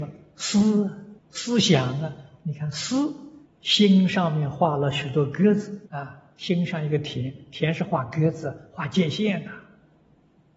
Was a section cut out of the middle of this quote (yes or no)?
yes